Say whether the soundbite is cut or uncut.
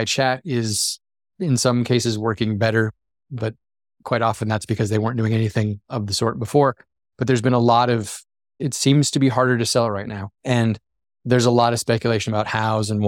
cut